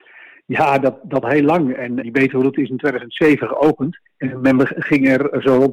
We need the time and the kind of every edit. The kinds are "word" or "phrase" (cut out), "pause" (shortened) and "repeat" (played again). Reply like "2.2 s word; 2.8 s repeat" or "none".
1.2 s phrase; 2.0 s word; 4.1 s pause